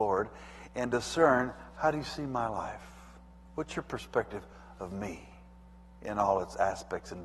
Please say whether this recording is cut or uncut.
uncut